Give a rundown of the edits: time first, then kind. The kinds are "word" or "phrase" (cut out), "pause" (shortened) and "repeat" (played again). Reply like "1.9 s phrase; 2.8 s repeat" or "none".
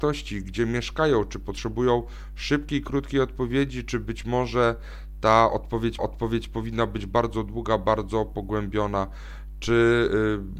6.0 s repeat